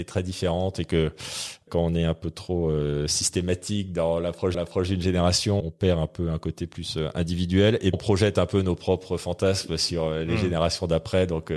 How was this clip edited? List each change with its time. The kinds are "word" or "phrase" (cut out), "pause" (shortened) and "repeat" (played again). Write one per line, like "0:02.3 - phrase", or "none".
0:01.7 - word
0:04.5 - repeat
0:05.6 - word
0:07.9 - word